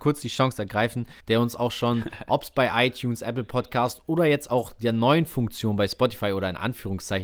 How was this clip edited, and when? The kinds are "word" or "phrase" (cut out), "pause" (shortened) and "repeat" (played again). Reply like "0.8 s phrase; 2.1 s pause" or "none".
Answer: 1.2 s pause